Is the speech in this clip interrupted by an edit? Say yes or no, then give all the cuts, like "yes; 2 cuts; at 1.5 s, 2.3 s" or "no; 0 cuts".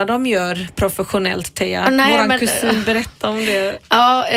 no; 0 cuts